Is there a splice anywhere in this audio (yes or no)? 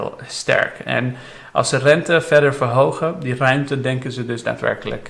no